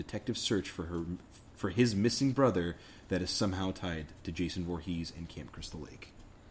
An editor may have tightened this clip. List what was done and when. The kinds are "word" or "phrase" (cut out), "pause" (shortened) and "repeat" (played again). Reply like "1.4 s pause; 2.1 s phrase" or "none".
none